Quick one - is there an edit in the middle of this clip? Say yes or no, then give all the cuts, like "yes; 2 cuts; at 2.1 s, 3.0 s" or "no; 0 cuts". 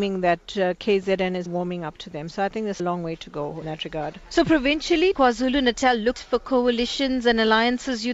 yes; 5 cuts; at 1.5 s, 2.8 s, 3.6 s, 5.1 s, 6.1 s